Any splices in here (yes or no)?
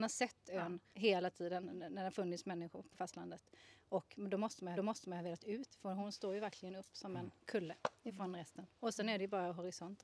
yes